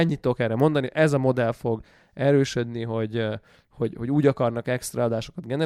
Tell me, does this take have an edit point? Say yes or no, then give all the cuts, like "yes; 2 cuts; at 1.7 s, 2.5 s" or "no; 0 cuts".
no; 0 cuts